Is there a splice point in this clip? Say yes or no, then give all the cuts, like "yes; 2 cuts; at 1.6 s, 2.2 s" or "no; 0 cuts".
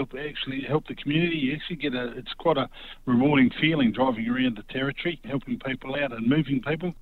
no; 0 cuts